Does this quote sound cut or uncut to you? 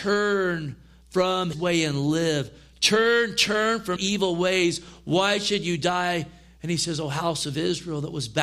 cut